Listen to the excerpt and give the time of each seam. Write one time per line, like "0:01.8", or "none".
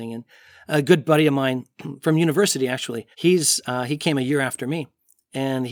0:03.1